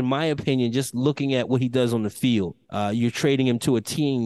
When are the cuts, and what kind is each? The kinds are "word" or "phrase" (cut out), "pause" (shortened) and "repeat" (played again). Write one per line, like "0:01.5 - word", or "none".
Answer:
0:02.6 - pause